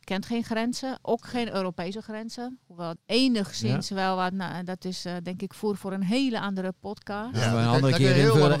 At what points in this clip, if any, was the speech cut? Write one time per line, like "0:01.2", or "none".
0:03.0